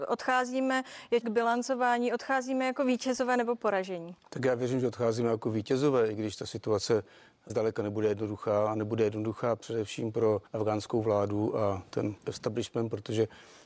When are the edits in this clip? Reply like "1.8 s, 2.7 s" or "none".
1.2 s, 7.5 s, 10.5 s, 12.2 s